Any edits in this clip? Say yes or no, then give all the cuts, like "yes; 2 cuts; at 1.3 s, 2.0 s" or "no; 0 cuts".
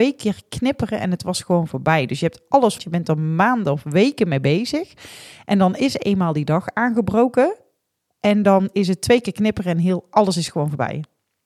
yes; 1 cut; at 2.8 s